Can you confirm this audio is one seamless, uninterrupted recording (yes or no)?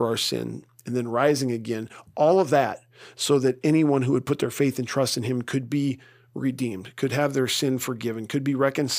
yes